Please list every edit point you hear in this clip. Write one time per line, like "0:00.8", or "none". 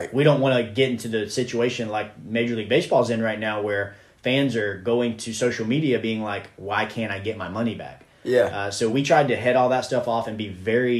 none